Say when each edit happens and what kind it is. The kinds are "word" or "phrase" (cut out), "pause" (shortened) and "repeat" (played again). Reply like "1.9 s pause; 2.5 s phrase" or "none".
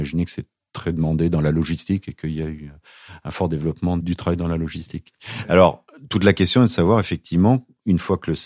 none